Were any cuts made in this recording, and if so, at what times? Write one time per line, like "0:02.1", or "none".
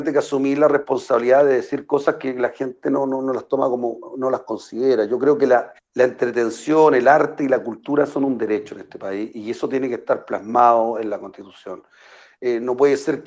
0:05.8